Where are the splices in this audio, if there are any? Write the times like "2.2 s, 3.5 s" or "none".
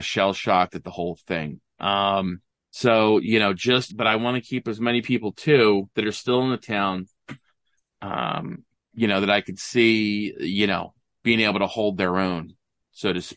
2.5 s, 3.9 s, 5.9 s, 8.8 s